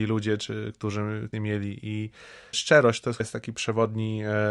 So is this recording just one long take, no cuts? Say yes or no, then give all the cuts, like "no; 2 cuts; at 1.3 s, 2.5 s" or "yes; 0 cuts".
no; 3 cuts; at 1.3 s, 2.5 s, 3.2 s